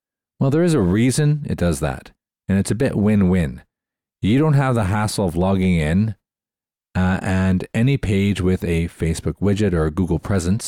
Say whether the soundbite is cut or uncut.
uncut